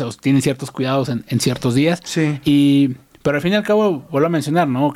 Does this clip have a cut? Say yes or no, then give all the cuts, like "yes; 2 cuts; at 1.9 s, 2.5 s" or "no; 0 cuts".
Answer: no; 0 cuts